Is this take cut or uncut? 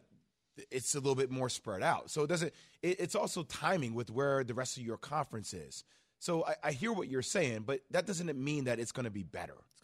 uncut